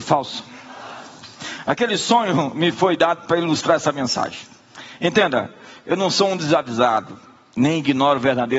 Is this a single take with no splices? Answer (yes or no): yes